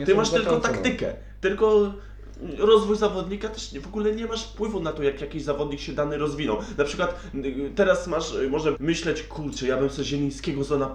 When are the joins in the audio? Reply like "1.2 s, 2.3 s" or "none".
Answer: 8.7 s